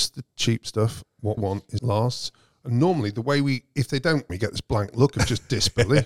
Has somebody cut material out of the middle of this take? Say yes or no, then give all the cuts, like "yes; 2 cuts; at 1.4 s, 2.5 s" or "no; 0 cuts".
yes; 3 cuts; at 1.4 s, 1.8 s, 4.3 s